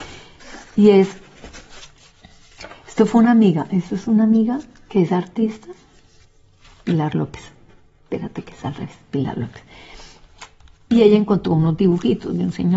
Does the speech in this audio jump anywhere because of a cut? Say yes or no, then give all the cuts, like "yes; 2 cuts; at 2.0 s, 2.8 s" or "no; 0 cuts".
no; 0 cuts